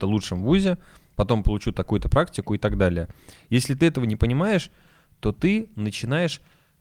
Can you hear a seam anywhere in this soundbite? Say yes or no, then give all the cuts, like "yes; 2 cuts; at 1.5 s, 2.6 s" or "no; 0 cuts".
no; 0 cuts